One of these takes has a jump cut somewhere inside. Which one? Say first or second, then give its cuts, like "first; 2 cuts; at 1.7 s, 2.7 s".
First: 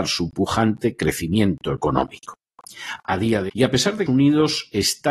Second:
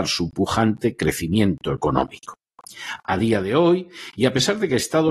first; 2 cuts; at 3.5 s, 4.1 s